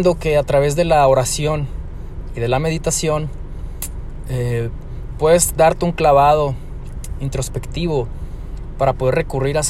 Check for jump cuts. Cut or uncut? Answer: uncut